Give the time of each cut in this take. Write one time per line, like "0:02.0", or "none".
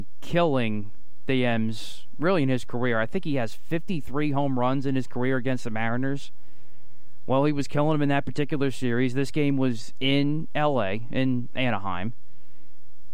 none